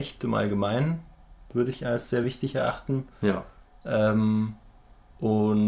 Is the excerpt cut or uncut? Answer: uncut